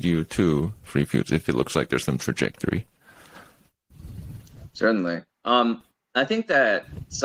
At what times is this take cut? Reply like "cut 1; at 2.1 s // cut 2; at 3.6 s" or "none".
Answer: none